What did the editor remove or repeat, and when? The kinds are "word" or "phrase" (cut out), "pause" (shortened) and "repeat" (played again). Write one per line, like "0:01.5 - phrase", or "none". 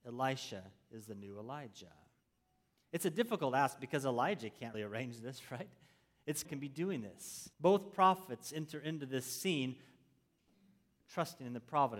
0:04.7 - word
0:06.4 - phrase
0:07.5 - pause